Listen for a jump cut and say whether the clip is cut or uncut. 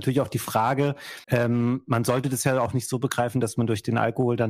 cut